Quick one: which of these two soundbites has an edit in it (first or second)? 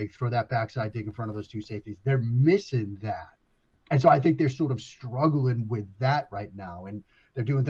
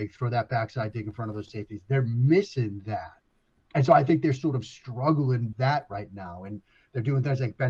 second